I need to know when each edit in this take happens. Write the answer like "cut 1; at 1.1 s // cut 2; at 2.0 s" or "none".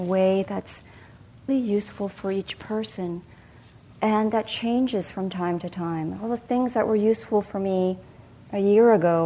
cut 1; at 1.5 s